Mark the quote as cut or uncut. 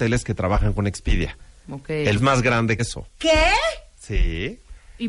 cut